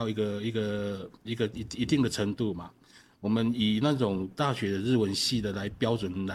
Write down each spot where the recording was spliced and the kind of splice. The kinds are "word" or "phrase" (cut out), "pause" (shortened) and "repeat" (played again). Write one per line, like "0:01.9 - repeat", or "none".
none